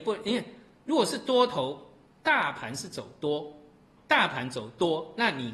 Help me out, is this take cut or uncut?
cut